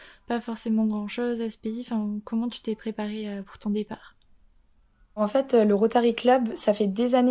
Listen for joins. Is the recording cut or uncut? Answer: uncut